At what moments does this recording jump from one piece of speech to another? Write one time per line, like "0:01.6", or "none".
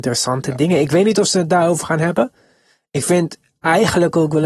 none